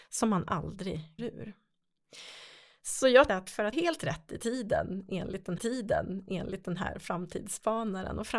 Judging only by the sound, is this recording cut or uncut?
cut